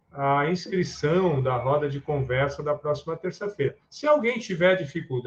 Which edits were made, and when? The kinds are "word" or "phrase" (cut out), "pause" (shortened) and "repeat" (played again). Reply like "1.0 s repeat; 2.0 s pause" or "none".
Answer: 3.8 s pause